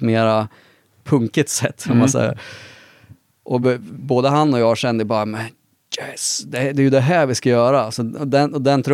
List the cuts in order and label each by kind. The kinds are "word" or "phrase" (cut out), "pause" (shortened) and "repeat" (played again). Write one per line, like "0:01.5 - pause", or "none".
none